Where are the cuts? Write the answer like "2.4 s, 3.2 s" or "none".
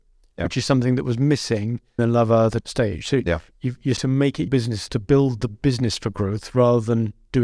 2.0 s, 2.6 s, 4.0 s, 4.5 s, 4.9 s